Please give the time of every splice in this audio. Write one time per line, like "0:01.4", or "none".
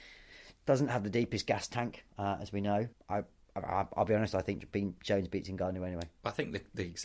0:02.9